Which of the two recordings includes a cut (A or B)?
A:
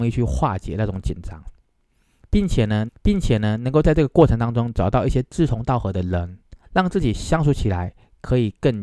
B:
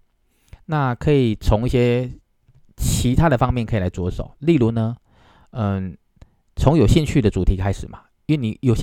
A